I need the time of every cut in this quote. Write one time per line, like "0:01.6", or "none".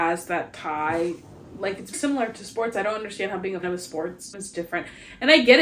0:01.9
0:03.6
0:04.3